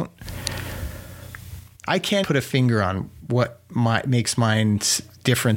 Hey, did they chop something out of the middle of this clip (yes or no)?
yes